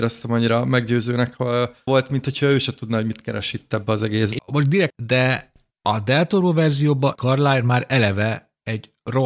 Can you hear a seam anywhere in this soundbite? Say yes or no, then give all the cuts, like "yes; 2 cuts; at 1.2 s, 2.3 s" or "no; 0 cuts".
yes; 4 cuts; at 1.9 s, 4.4 s, 4.9 s, 7.2 s